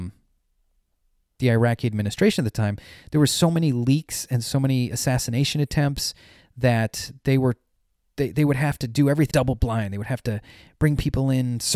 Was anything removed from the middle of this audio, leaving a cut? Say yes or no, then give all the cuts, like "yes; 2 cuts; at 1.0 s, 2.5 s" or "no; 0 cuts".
yes; 1 cut; at 9.3 s